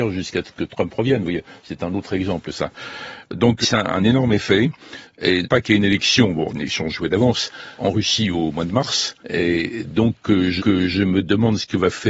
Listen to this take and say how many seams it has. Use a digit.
6